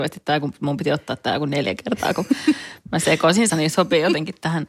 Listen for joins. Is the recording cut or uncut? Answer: cut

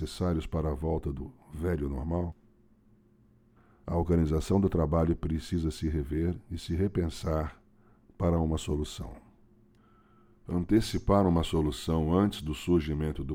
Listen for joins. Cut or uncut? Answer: uncut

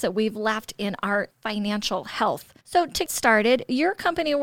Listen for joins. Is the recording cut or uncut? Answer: cut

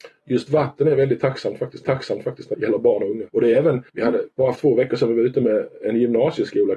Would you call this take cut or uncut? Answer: cut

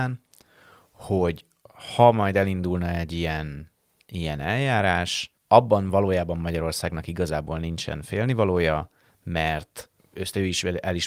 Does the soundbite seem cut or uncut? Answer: cut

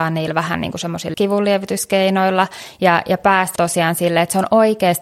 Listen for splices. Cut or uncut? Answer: cut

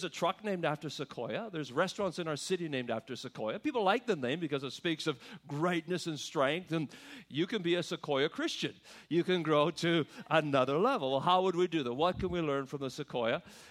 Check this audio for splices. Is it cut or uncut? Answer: uncut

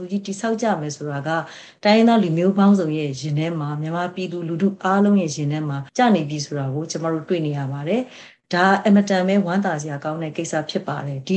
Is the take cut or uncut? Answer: cut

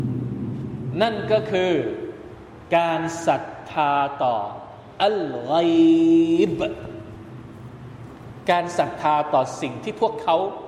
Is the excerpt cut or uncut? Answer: cut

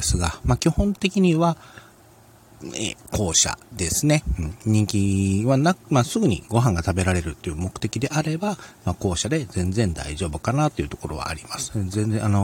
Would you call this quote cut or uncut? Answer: uncut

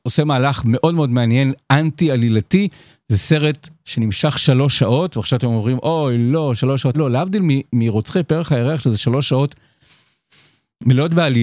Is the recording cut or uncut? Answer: cut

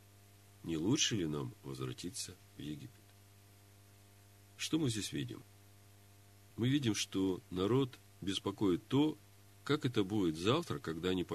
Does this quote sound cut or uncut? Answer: uncut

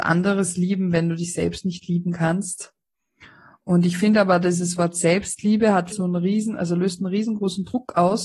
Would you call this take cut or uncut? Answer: cut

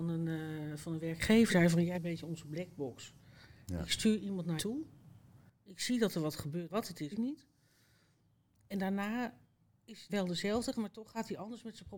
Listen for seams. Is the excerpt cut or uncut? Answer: cut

